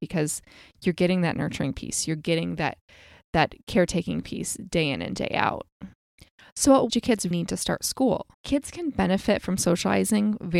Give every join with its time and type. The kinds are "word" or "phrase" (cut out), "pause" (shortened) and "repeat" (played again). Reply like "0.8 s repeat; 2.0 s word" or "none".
6.9 s phrase; 7.3 s word; 8.3 s pause